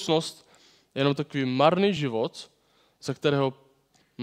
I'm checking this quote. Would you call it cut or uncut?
uncut